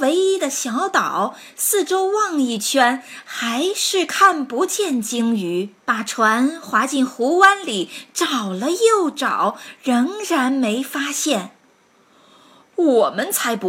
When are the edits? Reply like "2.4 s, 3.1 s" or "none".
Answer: 5.8 s